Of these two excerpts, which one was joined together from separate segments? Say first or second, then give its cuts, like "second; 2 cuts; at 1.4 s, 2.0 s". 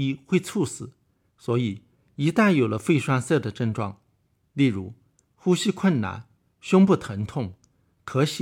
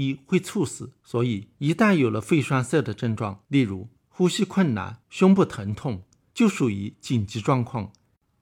second; 6 cuts; at 1.0 s, 1.5 s, 3.4 s, 4.0 s, 5.0 s, 6.3 s